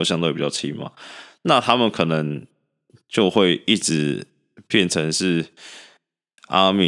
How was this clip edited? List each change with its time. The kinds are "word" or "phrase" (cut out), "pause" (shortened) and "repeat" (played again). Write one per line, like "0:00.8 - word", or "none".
none